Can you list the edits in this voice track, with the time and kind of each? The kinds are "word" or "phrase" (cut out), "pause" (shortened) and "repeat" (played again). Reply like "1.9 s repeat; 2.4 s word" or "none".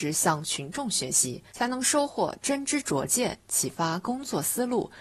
1.5 s pause